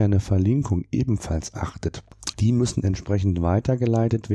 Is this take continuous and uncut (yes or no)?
no